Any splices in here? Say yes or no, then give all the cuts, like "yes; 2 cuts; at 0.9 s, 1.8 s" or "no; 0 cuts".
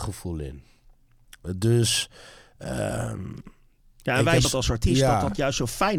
yes; 1 cut; at 4.4 s